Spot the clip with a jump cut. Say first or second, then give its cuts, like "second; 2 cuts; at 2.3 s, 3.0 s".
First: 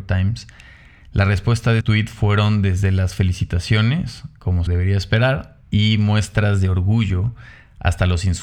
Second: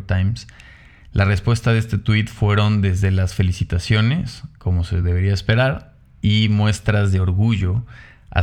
first; 3 cuts; at 1.8 s, 4.7 s, 5.6 s